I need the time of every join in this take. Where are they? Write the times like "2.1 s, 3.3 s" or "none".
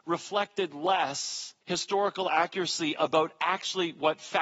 1.6 s